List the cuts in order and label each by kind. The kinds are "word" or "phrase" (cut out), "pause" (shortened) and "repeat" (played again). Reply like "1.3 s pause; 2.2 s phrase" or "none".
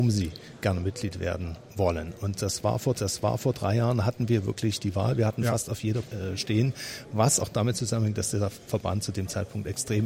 2.9 s repeat; 6.0 s phrase; 7.4 s word